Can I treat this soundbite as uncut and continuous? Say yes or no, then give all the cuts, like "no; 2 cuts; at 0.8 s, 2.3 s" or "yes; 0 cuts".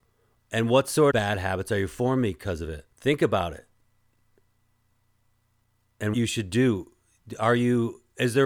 no; 3 cuts; at 1.1 s, 2.9 s, 6.1 s